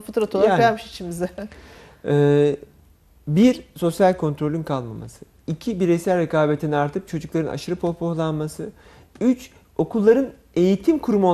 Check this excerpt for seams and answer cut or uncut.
uncut